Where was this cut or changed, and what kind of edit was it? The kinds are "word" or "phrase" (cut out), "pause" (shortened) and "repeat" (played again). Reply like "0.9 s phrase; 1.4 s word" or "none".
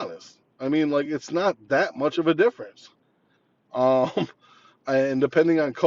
none